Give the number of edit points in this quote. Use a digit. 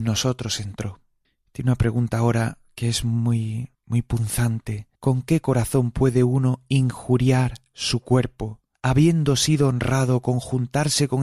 4